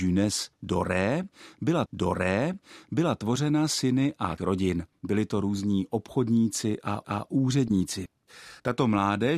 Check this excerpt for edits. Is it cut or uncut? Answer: cut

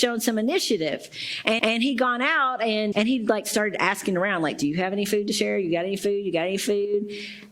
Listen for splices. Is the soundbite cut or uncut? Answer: cut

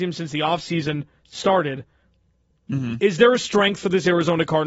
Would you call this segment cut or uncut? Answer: uncut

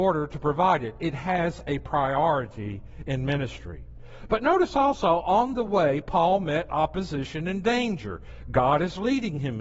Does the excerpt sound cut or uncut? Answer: uncut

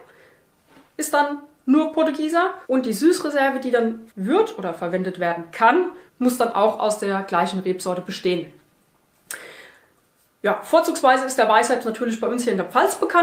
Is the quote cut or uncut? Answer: cut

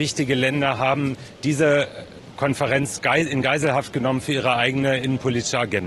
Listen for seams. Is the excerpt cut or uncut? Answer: uncut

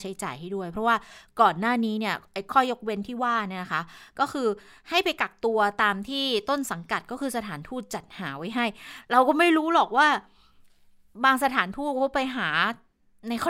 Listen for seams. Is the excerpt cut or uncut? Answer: uncut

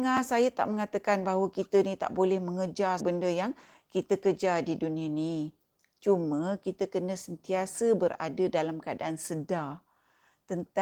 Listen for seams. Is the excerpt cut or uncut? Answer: cut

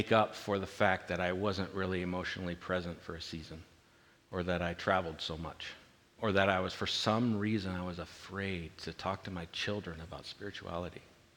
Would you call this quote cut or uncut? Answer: cut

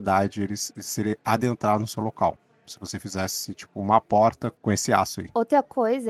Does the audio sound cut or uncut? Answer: uncut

